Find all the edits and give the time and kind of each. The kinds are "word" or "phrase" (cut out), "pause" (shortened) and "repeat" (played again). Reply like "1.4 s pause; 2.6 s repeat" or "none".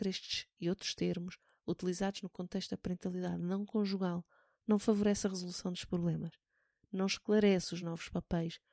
none